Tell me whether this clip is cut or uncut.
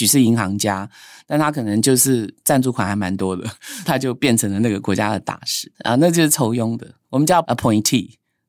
cut